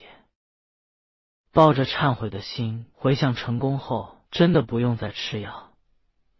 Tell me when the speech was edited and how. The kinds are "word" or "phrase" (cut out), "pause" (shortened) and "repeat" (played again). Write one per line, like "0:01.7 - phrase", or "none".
0:02.9 - pause
0:04.3 - pause